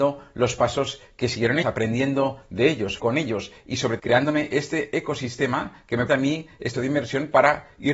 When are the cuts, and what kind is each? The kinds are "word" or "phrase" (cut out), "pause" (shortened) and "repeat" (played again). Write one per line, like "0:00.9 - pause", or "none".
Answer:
0:01.6 - word
0:03.0 - word
0:04.0 - word
0:06.1 - word
0:06.7 - word